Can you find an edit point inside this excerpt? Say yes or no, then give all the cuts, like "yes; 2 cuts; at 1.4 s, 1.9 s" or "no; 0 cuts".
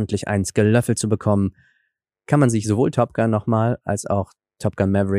no; 0 cuts